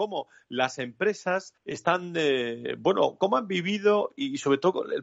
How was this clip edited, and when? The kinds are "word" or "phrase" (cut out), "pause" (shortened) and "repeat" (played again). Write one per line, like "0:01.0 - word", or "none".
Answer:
0:01.6 - pause